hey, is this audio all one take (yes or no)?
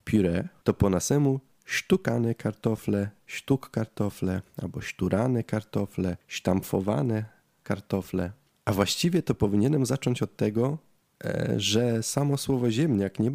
yes